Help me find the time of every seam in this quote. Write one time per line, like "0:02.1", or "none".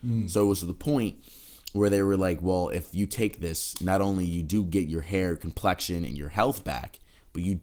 none